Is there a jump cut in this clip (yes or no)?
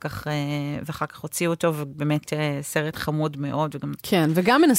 no